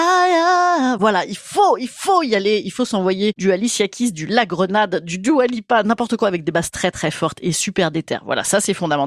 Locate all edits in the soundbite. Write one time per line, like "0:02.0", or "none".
none